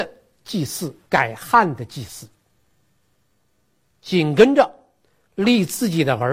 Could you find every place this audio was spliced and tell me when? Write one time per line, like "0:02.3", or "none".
0:01.0